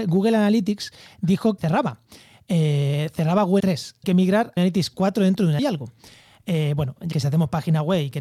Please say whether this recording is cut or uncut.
cut